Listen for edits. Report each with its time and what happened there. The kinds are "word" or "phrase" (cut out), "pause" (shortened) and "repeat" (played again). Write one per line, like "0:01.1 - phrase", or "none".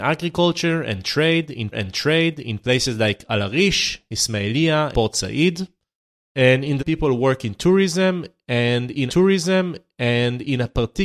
0:01.7 - repeat
0:04.9 - word
0:06.8 - phrase
0:09.1 - repeat